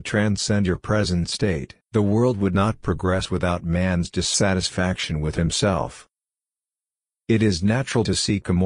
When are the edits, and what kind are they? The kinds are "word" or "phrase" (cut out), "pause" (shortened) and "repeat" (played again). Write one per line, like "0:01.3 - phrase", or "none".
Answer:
0:01.8 - pause